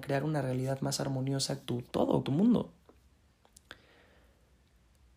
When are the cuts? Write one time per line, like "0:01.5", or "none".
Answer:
0:01.6
0:02.2